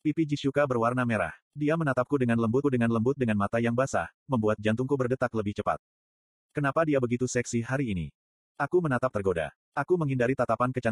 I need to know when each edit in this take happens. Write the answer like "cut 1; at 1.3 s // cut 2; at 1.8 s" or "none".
cut 1; at 2.6 s // cut 2; at 9.1 s